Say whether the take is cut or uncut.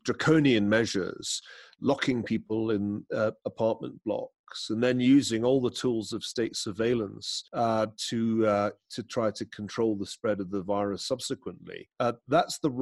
cut